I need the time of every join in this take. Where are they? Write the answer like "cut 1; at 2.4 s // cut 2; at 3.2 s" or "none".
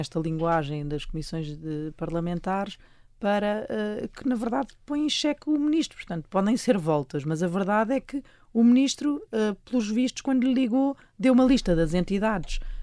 none